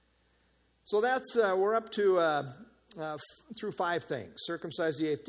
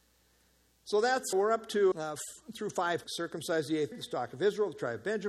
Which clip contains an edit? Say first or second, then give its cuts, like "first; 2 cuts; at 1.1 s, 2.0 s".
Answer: second; 4 cuts; at 1.3 s, 1.9 s, 3.0 s, 3.9 s